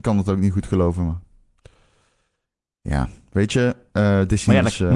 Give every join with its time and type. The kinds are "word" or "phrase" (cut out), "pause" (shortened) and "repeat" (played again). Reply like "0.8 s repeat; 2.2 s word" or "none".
none